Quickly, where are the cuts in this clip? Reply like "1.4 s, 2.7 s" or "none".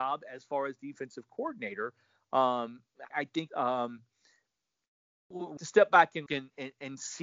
3.1 s, 3.5 s, 5.6 s, 6.3 s